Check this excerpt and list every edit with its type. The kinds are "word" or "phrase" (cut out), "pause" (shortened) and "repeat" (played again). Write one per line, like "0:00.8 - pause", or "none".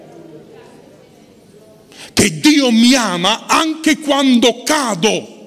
none

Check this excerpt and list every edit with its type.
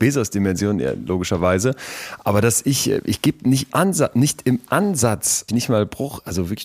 0:03.7 - word
0:05.5 - phrase

